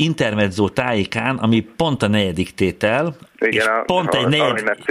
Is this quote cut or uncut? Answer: uncut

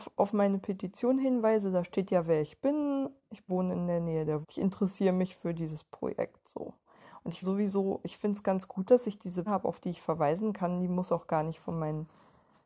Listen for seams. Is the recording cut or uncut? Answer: cut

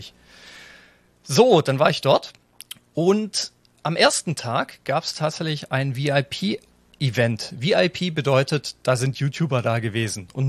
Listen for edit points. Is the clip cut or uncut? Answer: uncut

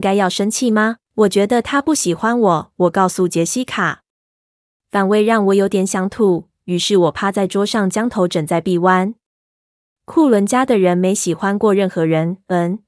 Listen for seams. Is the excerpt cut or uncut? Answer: cut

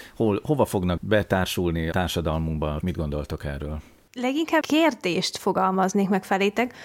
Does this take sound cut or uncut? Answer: cut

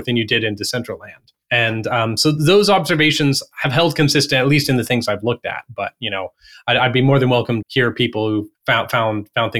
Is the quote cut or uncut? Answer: cut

